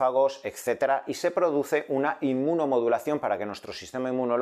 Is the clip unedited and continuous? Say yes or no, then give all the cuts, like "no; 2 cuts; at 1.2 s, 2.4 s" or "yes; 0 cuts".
yes; 0 cuts